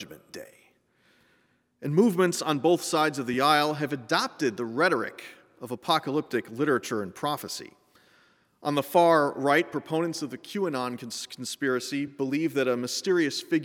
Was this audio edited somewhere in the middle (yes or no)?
no